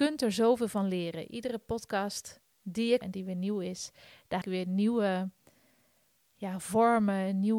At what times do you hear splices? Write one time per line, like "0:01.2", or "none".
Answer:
0:03.0
0:04.4

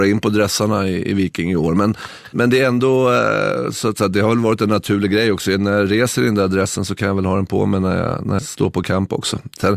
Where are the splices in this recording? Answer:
0:02.3
0:08.4

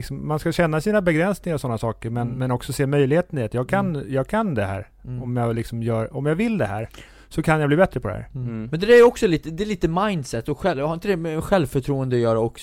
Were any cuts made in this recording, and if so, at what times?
none

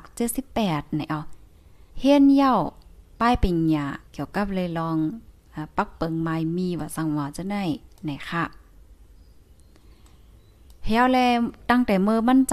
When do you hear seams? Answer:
0:01.9
0:04.1
0:07.9

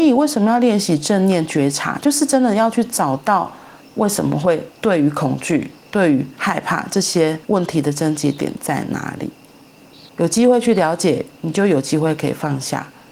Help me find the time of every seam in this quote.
0:03.8
0:04.7
0:07.4
0:10.1

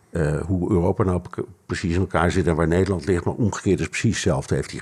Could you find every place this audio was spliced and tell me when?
none

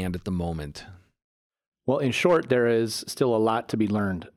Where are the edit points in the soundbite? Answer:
none

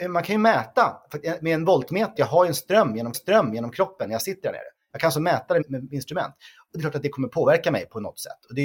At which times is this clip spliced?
0:02.2
0:03.1
0:05.6

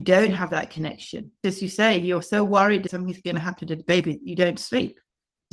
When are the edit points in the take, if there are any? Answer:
none

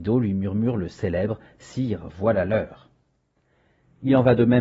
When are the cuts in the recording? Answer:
none

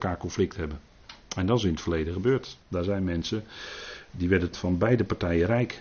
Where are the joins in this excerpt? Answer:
0:02.6
0:04.5

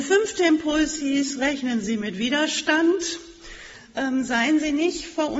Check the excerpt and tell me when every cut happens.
none

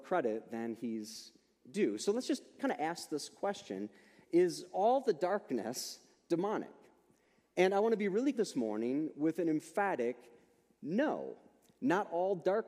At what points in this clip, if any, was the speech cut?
0:08.3

